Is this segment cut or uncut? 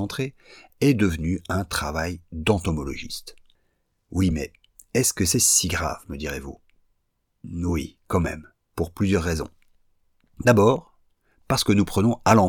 uncut